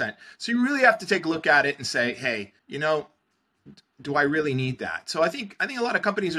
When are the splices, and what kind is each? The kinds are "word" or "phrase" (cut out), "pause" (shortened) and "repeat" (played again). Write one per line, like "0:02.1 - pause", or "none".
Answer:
0:02.6 - pause